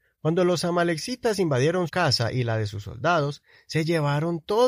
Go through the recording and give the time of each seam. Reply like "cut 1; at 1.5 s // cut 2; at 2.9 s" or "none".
cut 1; at 1.9 s